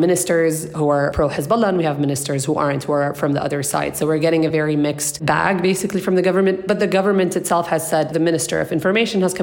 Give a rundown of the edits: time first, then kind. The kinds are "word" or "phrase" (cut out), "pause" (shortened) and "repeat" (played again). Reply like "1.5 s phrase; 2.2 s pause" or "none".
none